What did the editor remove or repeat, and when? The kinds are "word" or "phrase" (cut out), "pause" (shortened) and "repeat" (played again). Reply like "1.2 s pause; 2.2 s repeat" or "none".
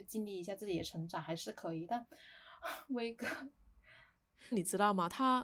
4.5 s phrase